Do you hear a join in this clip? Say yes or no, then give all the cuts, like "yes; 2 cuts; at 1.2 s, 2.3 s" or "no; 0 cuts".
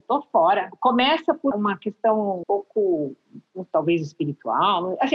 yes; 2 cuts; at 1.5 s, 2.4 s